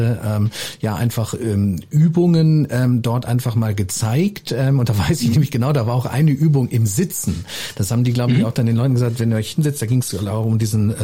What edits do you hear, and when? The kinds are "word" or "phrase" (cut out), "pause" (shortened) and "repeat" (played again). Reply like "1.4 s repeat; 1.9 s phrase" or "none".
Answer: none